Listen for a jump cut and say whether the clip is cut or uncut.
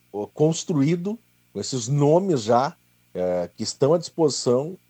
uncut